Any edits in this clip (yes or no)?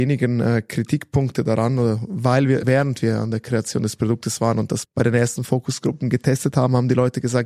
yes